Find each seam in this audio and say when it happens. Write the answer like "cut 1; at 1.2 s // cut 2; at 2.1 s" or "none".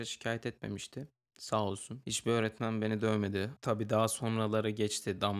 none